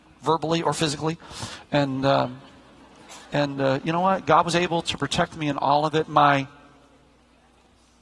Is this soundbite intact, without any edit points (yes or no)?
no